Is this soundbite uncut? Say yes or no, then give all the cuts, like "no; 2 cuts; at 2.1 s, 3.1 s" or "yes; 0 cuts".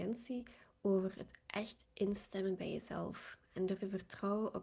yes; 0 cuts